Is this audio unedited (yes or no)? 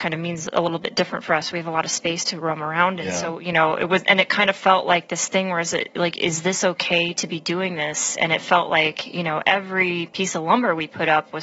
yes